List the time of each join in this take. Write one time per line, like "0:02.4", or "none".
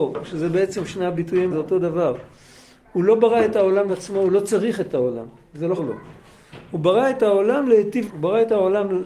0:01.5
0:03.9
0:05.8
0:08.1